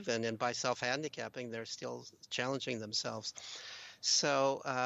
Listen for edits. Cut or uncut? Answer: uncut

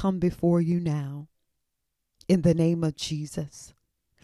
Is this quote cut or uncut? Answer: uncut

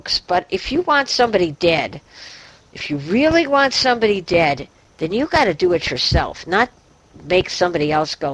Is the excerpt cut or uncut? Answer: uncut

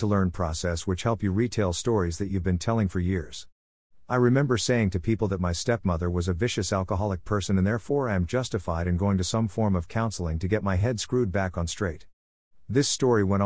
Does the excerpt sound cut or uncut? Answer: uncut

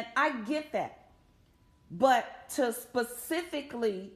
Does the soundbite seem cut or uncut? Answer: uncut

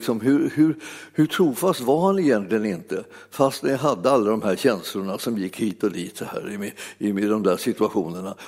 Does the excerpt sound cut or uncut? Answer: uncut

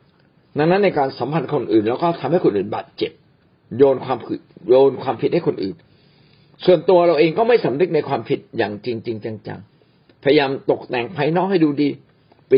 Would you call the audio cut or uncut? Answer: cut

